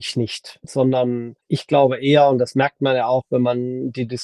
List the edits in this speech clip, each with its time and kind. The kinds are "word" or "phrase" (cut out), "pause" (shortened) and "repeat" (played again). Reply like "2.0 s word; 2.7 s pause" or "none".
none